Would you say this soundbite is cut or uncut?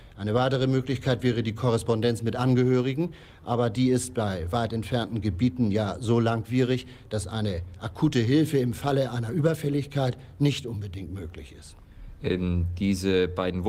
uncut